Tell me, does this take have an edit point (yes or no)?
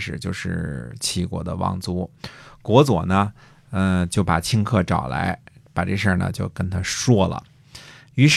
no